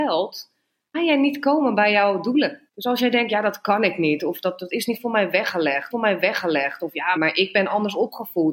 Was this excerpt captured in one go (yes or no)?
no